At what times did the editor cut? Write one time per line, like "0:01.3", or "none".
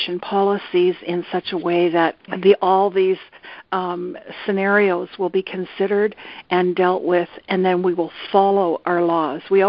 0:02.2